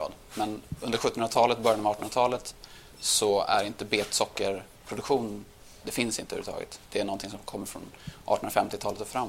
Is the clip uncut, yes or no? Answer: yes